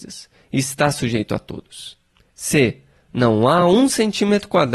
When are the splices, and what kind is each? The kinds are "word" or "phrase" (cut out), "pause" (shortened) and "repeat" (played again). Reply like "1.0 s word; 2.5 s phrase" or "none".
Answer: none